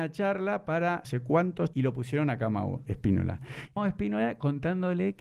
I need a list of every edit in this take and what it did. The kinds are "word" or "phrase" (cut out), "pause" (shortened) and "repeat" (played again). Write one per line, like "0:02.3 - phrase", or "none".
0:01.0 - word
0:01.7 - word
0:03.8 - word